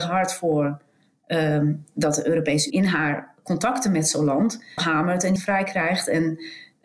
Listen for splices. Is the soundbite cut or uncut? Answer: cut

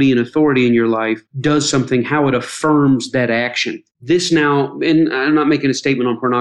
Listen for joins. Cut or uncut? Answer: cut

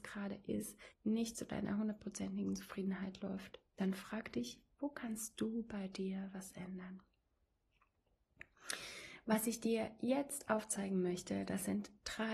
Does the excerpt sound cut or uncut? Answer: cut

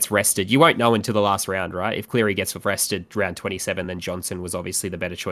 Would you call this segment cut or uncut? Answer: uncut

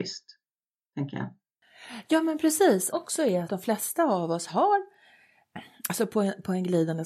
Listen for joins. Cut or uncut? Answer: cut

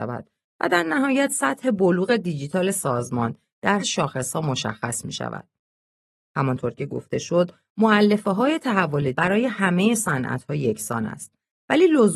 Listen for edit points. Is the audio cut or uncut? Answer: cut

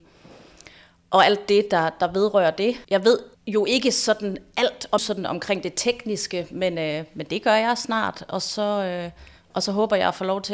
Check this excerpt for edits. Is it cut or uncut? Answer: cut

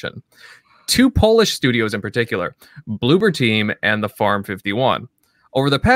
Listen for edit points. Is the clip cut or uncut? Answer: uncut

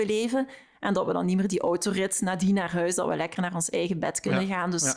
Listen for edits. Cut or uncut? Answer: uncut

